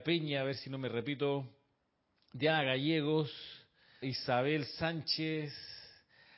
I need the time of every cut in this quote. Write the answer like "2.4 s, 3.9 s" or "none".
4.0 s